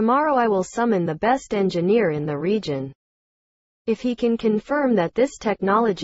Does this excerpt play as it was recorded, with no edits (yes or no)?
yes